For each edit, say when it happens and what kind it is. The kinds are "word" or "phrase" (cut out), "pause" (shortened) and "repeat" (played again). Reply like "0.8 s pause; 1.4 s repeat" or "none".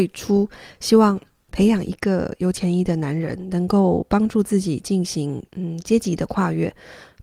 5.5 s pause